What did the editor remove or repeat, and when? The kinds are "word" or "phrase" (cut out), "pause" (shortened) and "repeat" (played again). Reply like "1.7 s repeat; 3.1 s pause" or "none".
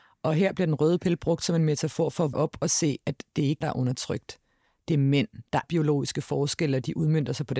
2.3 s word; 3.6 s word; 5.6 s word